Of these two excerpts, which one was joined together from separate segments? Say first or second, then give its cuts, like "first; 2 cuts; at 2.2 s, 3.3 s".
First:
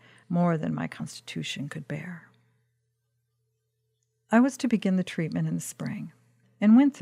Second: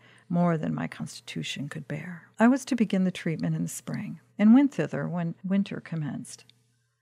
second; 2 cuts; at 2.3 s, 4.3 s